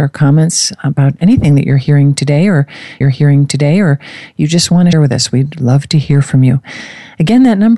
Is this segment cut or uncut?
cut